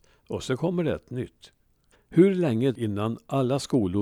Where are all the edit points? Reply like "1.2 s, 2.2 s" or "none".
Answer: 1.9 s, 2.7 s